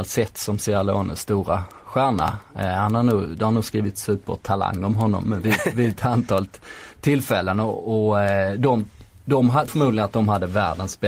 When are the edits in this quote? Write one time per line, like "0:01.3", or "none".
0:09.7